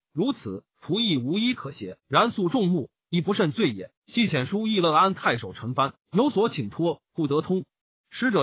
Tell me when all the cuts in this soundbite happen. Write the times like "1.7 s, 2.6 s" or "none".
2.0 s, 4.0 s